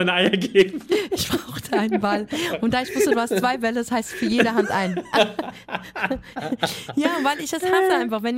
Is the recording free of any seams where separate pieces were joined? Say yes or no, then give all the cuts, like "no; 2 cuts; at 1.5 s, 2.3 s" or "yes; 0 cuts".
yes; 0 cuts